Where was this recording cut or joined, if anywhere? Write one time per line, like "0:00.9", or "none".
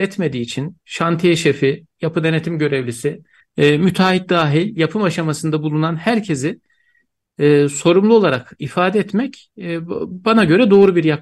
0:03.4